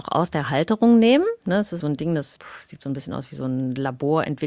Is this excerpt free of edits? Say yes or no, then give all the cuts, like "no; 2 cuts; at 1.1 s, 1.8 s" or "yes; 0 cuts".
no; 2 cuts; at 1.8 s, 2.4 s